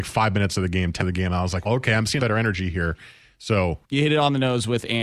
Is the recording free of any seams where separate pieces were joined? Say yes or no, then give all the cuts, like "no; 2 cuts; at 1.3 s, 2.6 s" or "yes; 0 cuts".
no; 4 cuts; at 1.0 s, 1.7 s, 2.2 s, 3.8 s